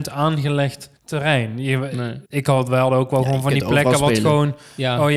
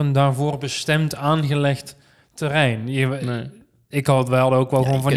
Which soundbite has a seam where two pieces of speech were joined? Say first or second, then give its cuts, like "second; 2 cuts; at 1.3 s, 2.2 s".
first; 2 cuts; at 1.0 s, 2.3 s